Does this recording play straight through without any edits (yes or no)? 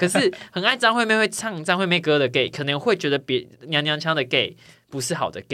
yes